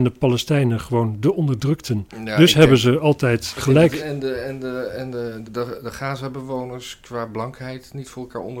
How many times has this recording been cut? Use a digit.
2